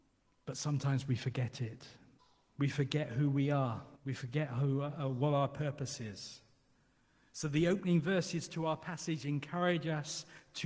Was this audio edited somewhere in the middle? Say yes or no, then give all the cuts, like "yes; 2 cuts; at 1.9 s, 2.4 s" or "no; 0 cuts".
yes; 2 cuts; at 2.2 s, 4.0 s